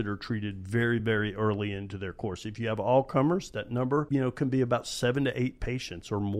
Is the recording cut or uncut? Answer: uncut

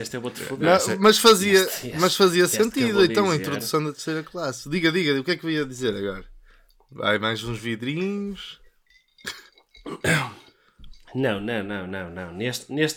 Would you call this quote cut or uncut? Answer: uncut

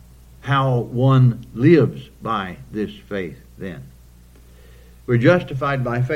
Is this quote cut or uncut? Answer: uncut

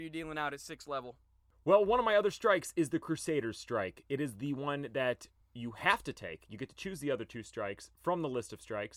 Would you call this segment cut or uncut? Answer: uncut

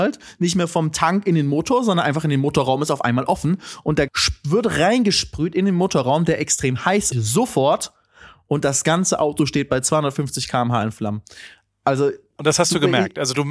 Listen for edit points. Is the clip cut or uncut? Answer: cut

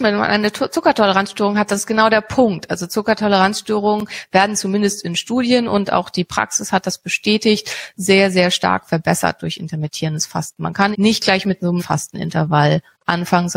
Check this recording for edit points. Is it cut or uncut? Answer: cut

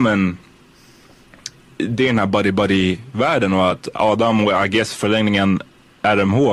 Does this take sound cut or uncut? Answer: uncut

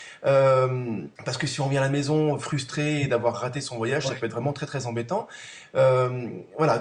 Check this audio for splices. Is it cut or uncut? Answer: cut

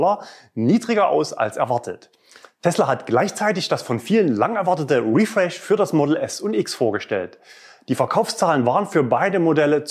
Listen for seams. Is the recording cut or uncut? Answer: uncut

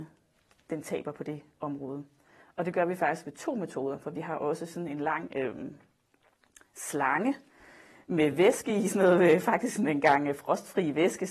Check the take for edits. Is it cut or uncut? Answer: uncut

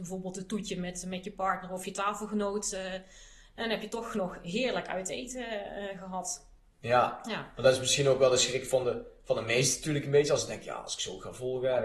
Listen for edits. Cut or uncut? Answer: uncut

